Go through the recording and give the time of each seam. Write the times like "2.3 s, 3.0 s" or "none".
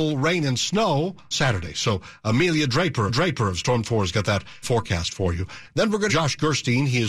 1.3 s, 3.1 s, 3.8 s, 4.6 s, 6.1 s